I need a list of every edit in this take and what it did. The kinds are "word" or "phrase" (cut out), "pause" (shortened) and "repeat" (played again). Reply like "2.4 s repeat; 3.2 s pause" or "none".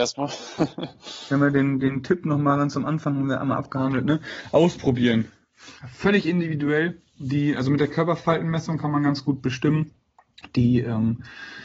5.8 s pause